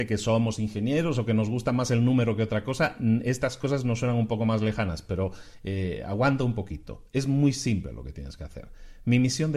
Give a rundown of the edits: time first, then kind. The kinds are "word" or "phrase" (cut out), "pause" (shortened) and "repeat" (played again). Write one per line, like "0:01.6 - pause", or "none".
none